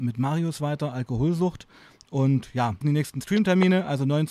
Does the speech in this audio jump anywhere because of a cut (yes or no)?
yes